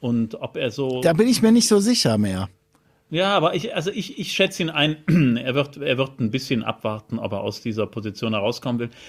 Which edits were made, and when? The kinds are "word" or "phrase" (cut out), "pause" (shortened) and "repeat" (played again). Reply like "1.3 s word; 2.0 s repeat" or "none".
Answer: none